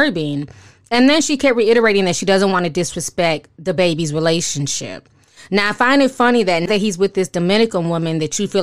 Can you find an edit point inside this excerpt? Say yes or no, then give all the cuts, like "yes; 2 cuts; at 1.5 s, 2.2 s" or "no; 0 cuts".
yes; 1 cut; at 6.7 s